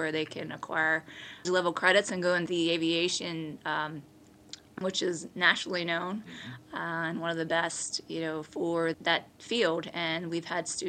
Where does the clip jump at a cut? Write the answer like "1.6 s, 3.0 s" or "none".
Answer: 1.4 s, 2.5 s, 4.8 s, 8.9 s